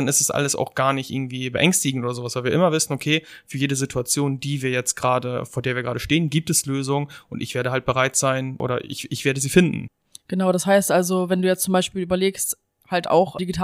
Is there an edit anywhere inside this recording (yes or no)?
no